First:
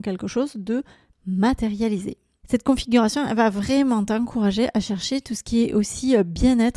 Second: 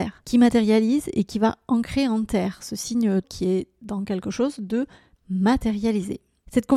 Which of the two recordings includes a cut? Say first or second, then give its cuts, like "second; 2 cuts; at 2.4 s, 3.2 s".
second; 1 cut; at 3.2 s